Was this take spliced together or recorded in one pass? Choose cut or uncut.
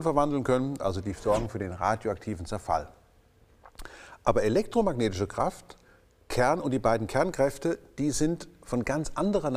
uncut